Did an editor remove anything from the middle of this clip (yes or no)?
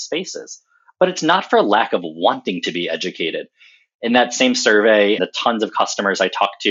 yes